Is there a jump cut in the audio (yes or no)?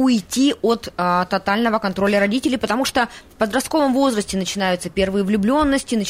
no